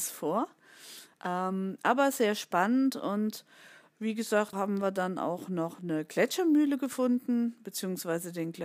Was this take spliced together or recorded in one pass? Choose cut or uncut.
cut